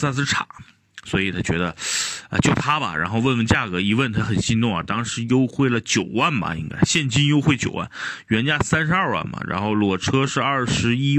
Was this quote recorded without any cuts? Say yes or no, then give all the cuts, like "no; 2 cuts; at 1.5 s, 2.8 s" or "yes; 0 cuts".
yes; 0 cuts